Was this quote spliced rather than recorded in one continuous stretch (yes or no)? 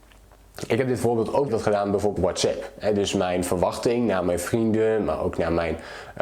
yes